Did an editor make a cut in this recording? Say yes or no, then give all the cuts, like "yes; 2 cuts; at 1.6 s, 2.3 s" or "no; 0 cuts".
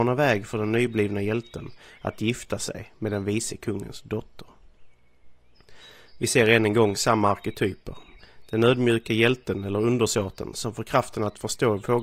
no; 0 cuts